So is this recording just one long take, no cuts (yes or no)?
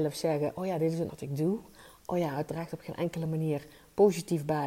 no